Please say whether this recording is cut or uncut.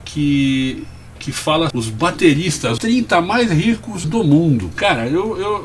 cut